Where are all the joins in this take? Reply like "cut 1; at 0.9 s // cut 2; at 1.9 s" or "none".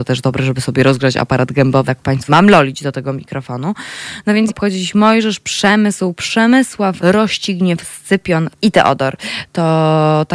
cut 1; at 1.9 s // cut 2; at 2.3 s // cut 3; at 4.5 s // cut 4; at 7.0 s // cut 5; at 8.5 s